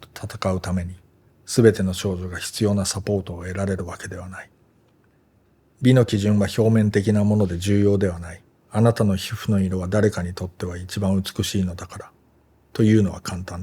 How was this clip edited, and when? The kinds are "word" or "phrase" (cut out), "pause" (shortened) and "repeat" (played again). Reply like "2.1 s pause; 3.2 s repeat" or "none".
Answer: 1.2 s pause; 5.1 s pause; 8.5 s pause